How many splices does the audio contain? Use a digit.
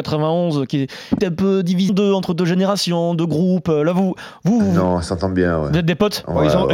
2